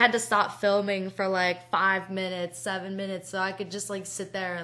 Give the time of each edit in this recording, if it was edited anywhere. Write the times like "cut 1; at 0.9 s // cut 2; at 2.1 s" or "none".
none